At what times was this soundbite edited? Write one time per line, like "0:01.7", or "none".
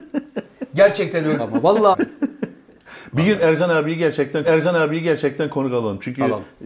0:01.4
0:01.9
0:04.4

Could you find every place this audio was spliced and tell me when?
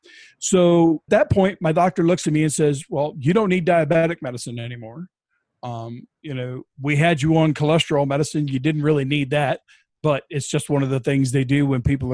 0:01.1

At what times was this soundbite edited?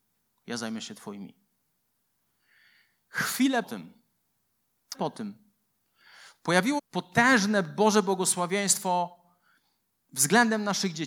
0:03.6
0:04.9
0:06.8

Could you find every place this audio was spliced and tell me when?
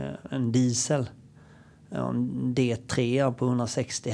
none

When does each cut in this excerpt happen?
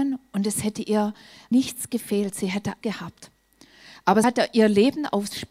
0:01.5
0:02.8
0:04.2

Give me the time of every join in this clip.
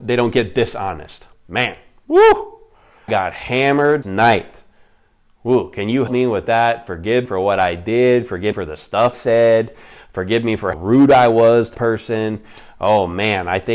0:01.3
0:03.1
0:04.0
0:06.1
0:07.3
0:08.5
0:09.1
0:10.7
0:11.7

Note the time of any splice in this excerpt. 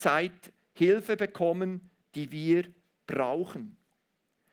none

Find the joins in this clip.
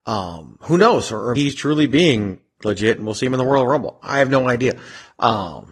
0:01.4

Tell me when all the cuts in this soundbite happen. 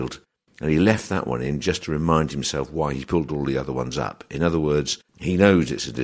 none

